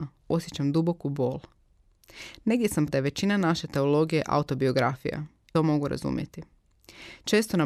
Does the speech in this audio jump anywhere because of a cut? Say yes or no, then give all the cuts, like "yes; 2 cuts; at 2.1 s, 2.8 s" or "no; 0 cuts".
yes; 2 cuts; at 2.9 s, 5.5 s